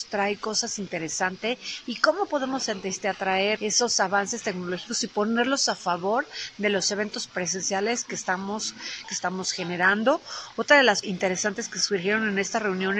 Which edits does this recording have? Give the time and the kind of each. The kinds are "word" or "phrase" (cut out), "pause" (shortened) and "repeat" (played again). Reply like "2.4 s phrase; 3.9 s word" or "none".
3.6 s word; 7.3 s word; 9.0 s word; 11.0 s word